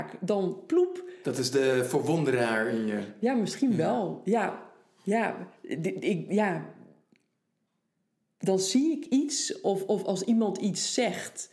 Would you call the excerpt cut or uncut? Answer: uncut